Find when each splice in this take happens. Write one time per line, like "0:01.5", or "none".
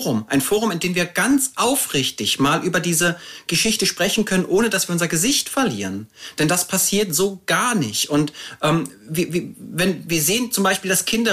none